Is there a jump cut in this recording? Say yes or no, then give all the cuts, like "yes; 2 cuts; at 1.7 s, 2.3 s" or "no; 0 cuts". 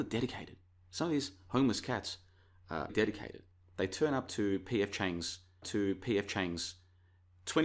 yes; 2 cuts; at 2.9 s, 5.6 s